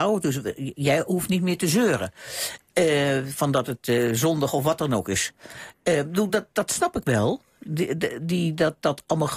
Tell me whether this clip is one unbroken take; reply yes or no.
yes